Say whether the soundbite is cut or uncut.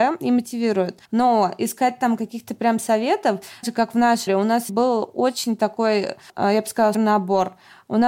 cut